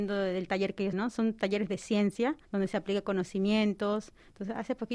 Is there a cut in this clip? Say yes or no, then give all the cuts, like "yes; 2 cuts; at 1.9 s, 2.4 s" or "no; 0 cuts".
yes; 2 cuts; at 0.9 s, 2.4 s